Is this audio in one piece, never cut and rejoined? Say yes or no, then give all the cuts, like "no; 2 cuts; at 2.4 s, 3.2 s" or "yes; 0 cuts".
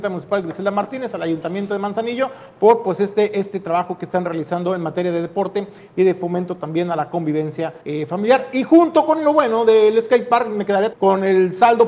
no; 2 cuts; at 7.8 s, 10.9 s